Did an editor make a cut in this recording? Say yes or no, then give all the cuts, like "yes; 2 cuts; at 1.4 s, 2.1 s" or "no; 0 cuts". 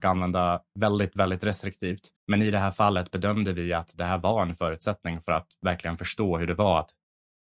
yes; 1 cut; at 2.2 s